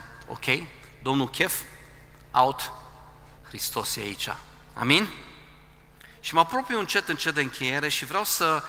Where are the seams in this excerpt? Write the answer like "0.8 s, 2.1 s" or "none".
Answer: 3.4 s